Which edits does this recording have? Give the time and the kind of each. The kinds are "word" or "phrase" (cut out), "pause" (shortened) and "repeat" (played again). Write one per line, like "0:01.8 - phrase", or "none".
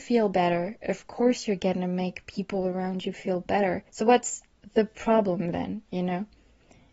0:03.9 - pause